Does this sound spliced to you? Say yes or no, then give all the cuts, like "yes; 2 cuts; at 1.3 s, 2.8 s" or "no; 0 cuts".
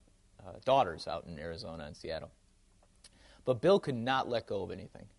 no; 0 cuts